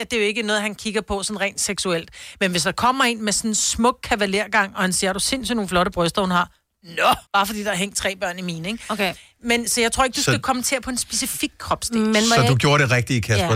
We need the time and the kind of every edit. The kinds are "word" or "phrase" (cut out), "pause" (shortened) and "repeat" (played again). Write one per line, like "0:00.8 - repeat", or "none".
0:07.3 - pause
0:09.7 - word